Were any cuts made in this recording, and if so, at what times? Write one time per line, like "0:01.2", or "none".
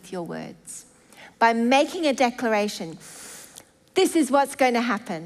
none